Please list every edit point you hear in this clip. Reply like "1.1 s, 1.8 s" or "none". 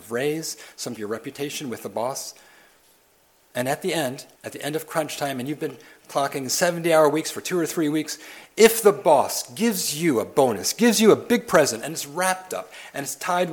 1.0 s, 4.4 s